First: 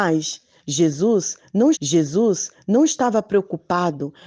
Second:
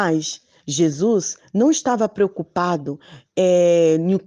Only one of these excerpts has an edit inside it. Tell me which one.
first; 1 cut; at 1.7 s

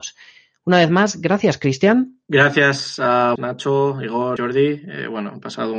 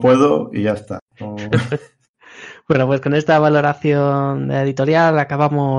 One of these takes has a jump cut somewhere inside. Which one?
first; 2 cuts; at 3.4 s, 4.4 s

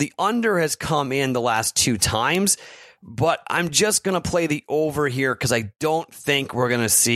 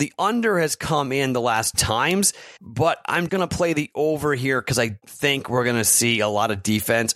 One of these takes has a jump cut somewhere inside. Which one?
second; 4 cuts; at 1.7 s, 2.6 s, 3.3 s, 5.0 s

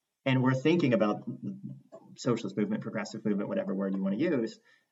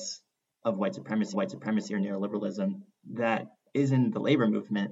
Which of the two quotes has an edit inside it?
second; 1 cut; at 1.3 s

